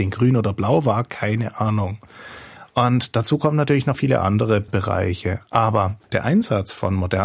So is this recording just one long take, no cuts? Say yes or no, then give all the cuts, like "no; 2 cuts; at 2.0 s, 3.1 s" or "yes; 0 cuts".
no; 2 cuts; at 3.9 s, 6.0 s